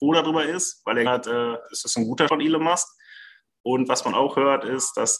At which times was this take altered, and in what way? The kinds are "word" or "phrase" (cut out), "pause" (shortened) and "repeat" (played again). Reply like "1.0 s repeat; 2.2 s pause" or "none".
1.1 s word; 2.3 s word